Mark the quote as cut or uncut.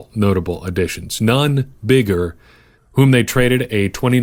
cut